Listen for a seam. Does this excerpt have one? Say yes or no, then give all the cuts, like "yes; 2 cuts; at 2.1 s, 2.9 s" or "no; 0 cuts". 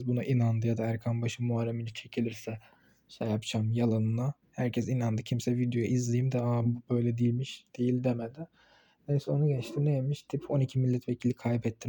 no; 0 cuts